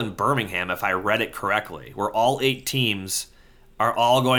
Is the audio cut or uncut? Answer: uncut